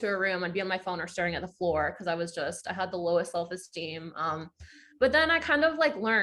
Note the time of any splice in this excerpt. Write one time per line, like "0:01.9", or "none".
none